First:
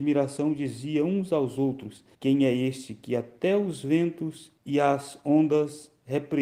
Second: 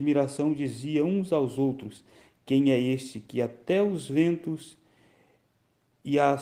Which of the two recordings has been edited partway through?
first; 2 cuts; at 2.1 s, 4.6 s

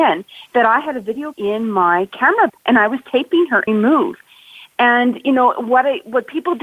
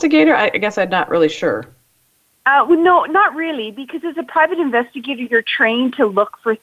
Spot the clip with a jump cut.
first; 3 cuts; at 1.3 s, 2.5 s, 3.7 s

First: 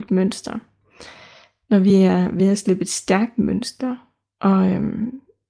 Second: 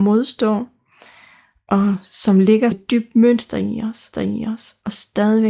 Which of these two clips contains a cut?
second; 2 cuts; at 2.7 s, 4.1 s

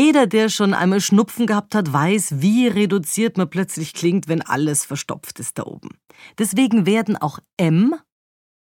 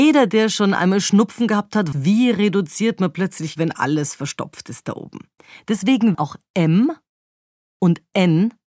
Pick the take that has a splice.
second; 3 cuts; at 1.9 s, 3.6 s, 6.1 s

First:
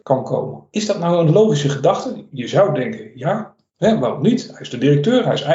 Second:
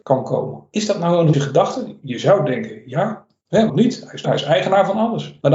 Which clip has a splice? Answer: second; 3 cuts; at 1.3 s, 3.7 s, 4.2 s

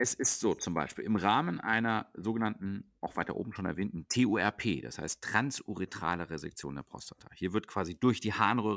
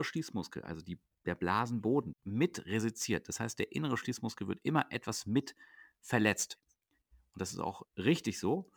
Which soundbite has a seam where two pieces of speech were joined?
second; 1 cut; at 2.1 s

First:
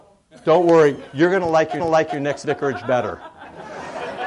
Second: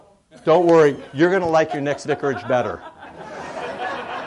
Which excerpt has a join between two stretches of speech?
first; 1 cut; at 1.8 s

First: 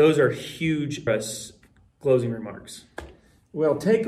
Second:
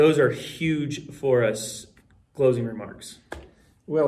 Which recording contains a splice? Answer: first; 1 cut; at 1.1 s

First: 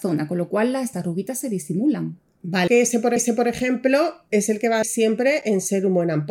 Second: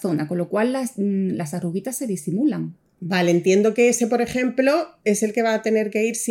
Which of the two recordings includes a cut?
first; 4 cuts; at 0.9 s, 2.7 s, 3.2 s, 4.8 s

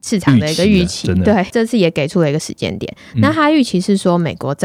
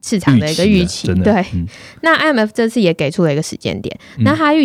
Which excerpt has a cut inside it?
first; 1 cut; at 1.5 s

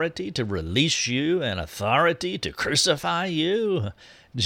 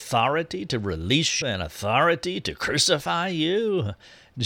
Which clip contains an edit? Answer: second; 1 cut; at 1.4 s

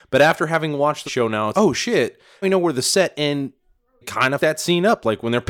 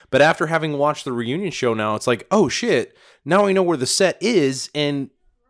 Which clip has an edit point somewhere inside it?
first; 6 cuts; at 1.1 s, 1.5 s, 2.4 s, 3.1 s, 4.0 s, 4.4 s

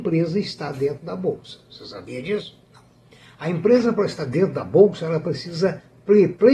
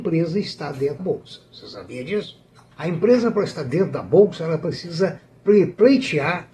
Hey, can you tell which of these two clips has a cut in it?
second; 2 cuts; at 1.0 s, 2.7 s

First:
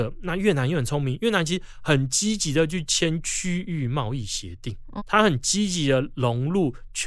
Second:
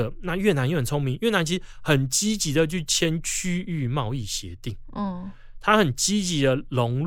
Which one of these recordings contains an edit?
first; 1 cut; at 5.0 s

